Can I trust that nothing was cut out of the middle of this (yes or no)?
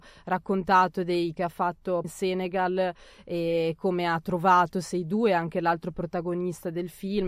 no